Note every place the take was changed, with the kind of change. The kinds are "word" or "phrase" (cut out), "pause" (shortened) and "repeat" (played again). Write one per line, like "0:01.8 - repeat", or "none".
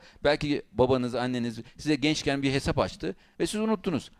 none